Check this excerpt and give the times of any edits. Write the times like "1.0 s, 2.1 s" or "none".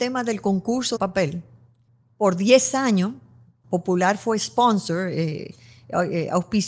1.0 s, 1.9 s, 3.6 s